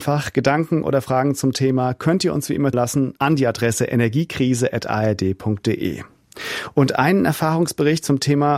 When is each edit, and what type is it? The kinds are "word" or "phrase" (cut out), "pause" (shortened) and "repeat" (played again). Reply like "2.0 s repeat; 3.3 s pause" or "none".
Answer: 2.7 s word; 3.2 s pause